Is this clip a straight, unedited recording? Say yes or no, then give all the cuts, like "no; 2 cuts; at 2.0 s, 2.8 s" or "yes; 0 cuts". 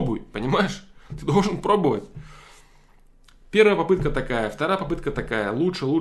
yes; 0 cuts